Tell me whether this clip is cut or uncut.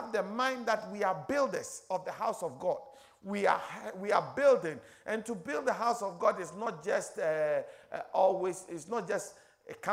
uncut